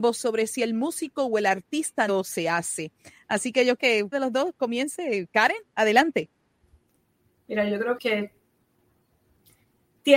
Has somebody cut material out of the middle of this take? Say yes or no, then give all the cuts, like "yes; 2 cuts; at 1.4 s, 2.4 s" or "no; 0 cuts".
yes; 4 cuts; at 2.1 s, 3.8 s, 4.1 s, 8.0 s